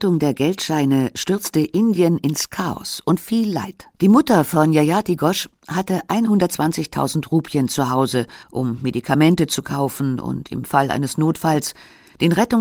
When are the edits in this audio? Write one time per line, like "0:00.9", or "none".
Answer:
0:03.2
0:03.9
0:08.4